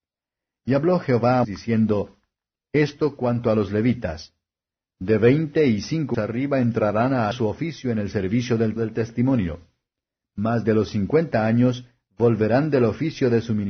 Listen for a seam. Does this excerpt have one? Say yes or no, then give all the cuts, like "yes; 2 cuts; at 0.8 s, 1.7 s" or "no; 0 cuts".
yes; 5 cuts; at 1.4 s, 6.1 s, 7.3 s, 8.8 s, 10.6 s